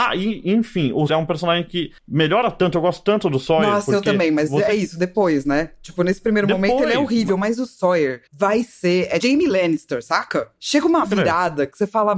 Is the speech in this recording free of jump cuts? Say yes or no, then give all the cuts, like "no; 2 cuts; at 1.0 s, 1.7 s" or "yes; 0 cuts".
no; 5 cuts; at 1.1 s, 2.0 s, 8.3 s, 9.2 s, 11.0 s